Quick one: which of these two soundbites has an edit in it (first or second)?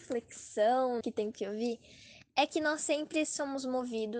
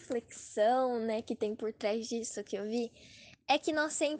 first